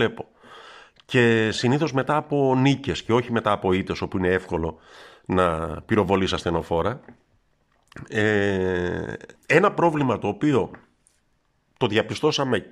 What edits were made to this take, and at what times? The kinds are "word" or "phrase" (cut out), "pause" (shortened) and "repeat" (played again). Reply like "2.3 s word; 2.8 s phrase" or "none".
9.3 s pause